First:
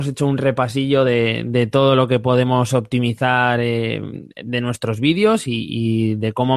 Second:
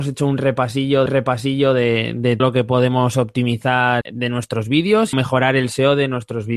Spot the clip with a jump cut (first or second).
second